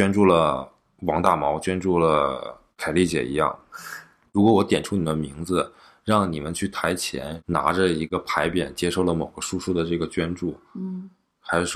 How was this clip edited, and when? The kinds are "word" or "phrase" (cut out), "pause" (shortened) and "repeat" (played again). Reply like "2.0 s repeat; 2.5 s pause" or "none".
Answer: none